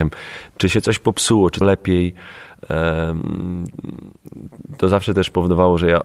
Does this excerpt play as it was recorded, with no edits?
no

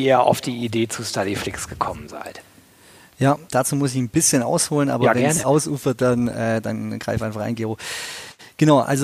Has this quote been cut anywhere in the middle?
yes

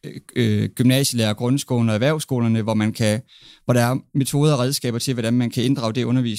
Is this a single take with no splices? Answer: yes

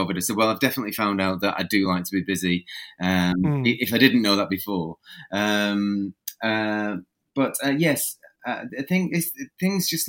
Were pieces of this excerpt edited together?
no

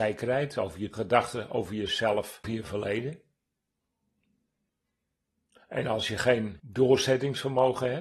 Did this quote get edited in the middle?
yes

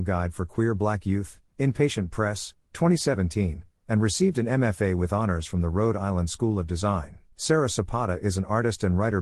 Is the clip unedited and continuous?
no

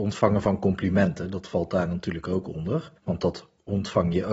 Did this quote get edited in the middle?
yes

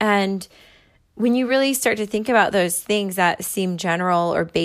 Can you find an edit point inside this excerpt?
no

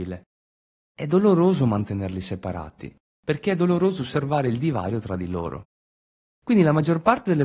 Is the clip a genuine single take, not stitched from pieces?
yes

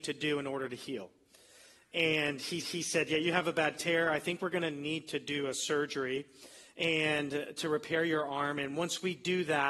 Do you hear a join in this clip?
yes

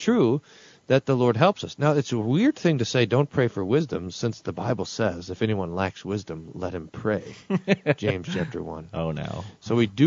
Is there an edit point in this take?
no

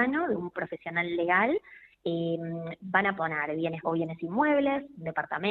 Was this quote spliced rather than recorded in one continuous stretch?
yes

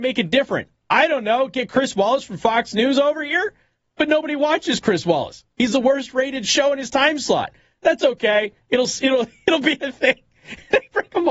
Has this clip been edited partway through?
no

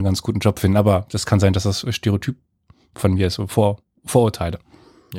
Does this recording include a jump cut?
no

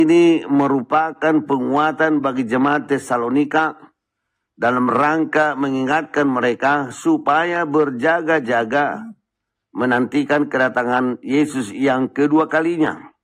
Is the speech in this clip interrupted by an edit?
no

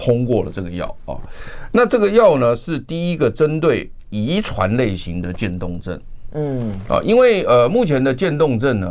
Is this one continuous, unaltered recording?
yes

